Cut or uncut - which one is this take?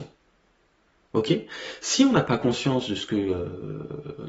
uncut